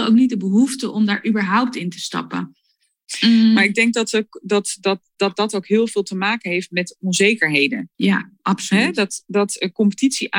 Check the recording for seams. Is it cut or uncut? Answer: cut